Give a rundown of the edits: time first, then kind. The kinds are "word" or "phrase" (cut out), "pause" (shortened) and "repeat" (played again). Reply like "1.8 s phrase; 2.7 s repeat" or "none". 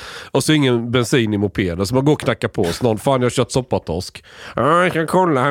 none